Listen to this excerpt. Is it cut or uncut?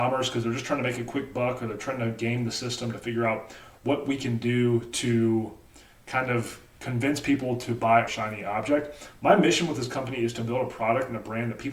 cut